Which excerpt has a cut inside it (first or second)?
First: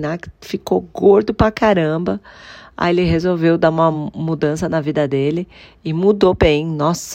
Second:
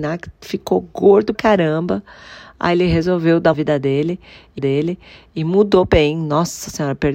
second